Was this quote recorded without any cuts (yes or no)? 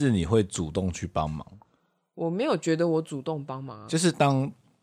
yes